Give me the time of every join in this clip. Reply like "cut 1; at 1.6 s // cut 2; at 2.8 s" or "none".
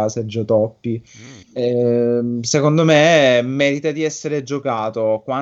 cut 1; at 1.4 s